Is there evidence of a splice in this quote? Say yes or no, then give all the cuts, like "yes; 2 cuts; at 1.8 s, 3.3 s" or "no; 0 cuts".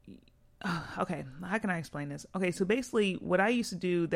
no; 0 cuts